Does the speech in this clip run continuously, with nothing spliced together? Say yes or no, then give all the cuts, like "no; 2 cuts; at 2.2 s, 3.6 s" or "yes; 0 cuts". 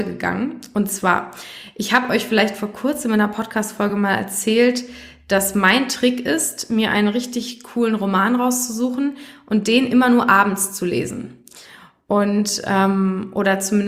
yes; 0 cuts